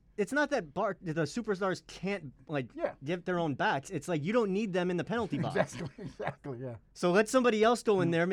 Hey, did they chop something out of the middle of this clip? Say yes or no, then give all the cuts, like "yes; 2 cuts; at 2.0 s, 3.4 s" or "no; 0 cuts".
no; 0 cuts